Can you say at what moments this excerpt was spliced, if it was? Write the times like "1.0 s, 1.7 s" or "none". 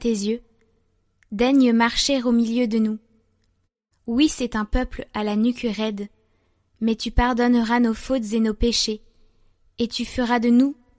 none